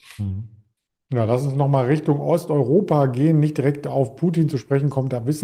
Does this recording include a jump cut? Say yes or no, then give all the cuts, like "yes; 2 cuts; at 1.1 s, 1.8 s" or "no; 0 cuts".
no; 0 cuts